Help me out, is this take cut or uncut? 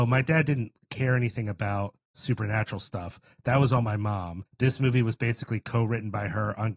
cut